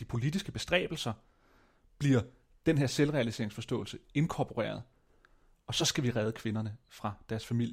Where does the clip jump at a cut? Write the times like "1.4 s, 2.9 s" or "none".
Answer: none